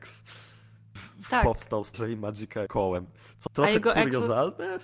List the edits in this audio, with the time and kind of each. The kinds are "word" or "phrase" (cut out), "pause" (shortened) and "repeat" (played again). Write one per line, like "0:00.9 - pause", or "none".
0:01.0 - word
0:01.9 - word
0:02.7 - word
0:03.5 - word